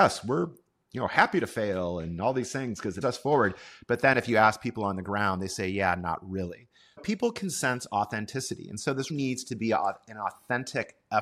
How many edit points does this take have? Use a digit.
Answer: 3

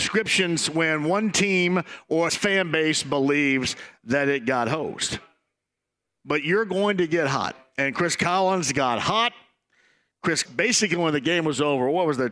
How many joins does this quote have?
2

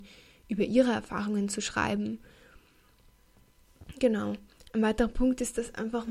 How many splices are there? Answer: 0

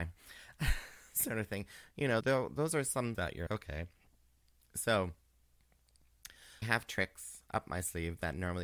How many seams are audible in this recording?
4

